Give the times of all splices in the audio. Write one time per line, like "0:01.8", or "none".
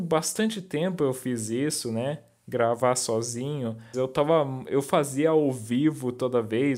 0:03.9